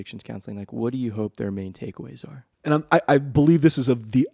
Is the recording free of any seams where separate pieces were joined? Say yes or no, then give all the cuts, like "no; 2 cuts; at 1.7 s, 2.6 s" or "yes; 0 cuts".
no; 1 cut; at 2.5 s